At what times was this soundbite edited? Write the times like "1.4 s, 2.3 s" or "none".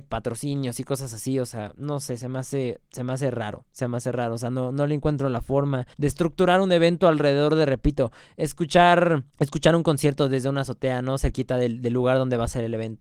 2.9 s, 5.9 s, 9.3 s